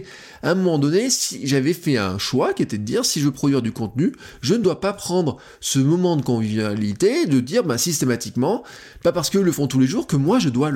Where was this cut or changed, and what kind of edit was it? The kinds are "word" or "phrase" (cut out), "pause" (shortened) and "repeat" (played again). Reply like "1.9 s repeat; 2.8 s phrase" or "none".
none